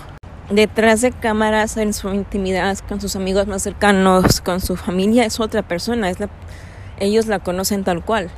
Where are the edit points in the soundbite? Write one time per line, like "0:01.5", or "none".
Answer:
none